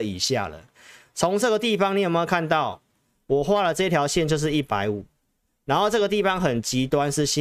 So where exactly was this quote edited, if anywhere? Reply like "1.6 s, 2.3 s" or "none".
none